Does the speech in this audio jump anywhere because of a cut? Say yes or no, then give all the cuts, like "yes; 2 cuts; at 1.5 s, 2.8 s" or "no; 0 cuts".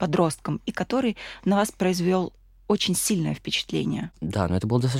no; 0 cuts